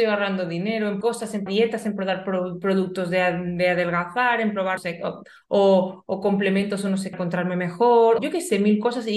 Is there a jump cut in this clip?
yes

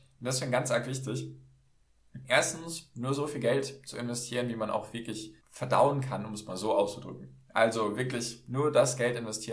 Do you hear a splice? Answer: yes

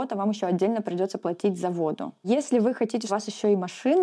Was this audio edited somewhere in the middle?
yes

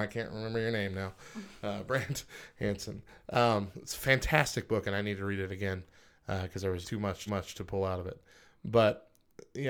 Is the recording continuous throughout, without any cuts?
no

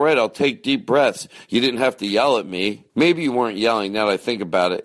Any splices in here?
yes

